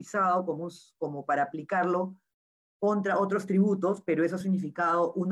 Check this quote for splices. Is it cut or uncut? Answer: uncut